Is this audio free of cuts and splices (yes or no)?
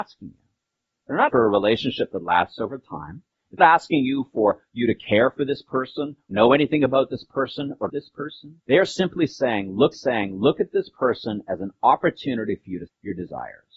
no